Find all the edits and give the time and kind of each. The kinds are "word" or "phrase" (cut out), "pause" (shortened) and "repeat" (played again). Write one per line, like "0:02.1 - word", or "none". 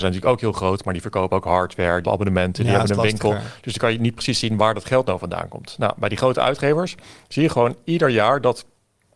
0:02.1 - word